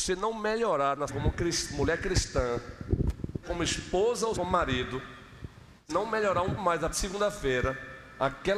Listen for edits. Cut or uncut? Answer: cut